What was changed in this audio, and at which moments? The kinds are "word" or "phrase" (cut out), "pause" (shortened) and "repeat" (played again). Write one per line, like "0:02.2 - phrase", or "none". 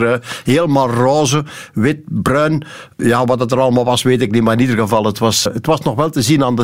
0:05.5 - word

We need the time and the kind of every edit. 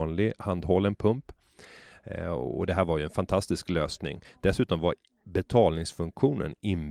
none

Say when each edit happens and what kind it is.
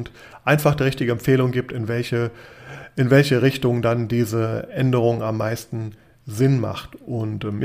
none

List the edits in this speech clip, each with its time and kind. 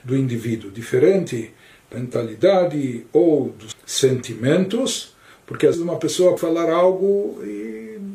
0:01.9 - word
0:03.7 - word
0:05.7 - word
0:06.4 - word

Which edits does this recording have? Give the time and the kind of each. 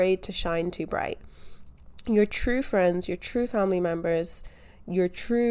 none

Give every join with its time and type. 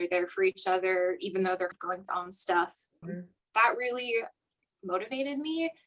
0:01.7 - word
0:02.1 - word
0:03.0 - word

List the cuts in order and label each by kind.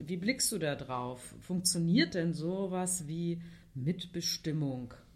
none

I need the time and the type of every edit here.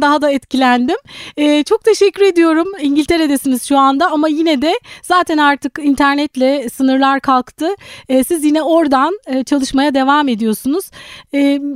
none

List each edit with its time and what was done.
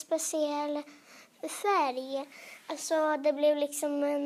none

